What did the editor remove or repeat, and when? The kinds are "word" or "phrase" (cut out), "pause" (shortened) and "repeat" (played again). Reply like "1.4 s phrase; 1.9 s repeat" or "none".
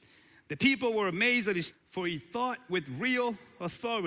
1.7 s word